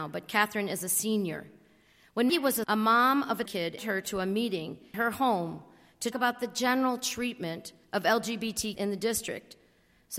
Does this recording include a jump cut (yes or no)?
yes